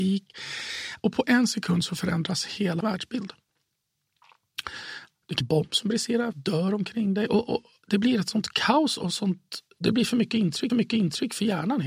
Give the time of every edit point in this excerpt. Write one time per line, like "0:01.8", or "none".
0:02.8
0:05.4
0:06.3
0:10.7

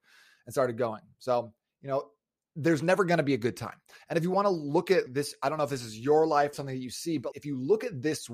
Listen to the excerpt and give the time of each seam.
0:05.1
0:06.5
0:07.3

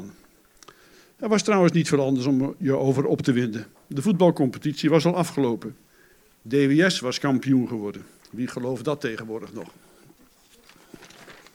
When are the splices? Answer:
none

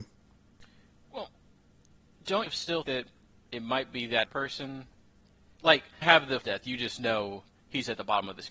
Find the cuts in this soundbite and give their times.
0:02.5
0:02.8
0:04.3
0:06.0
0:06.4

